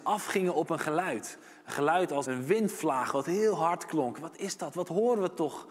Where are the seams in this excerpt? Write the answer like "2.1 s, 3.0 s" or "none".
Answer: 2.2 s, 4.3 s